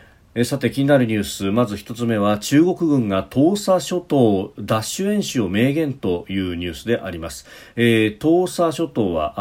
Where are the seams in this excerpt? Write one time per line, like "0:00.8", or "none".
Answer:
none